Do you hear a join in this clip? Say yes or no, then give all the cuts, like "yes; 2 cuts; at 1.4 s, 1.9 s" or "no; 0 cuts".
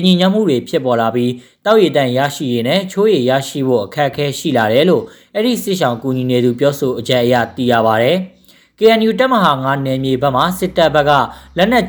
no; 0 cuts